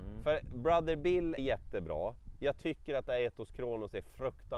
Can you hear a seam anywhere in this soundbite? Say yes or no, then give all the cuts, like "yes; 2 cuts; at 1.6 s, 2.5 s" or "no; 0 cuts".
yes; 1 cut; at 1.4 s